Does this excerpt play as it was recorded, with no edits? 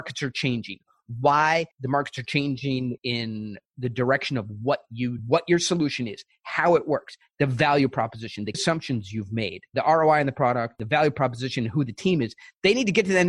no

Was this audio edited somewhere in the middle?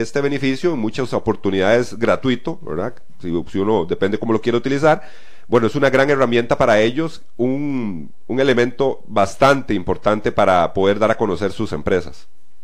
no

